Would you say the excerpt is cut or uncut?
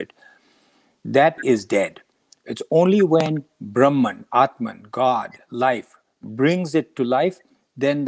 cut